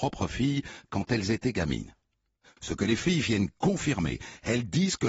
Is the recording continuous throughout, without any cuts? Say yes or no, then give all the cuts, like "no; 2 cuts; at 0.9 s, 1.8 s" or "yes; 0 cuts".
yes; 0 cuts